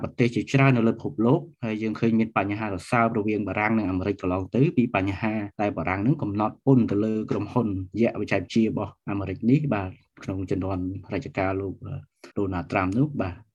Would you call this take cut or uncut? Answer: cut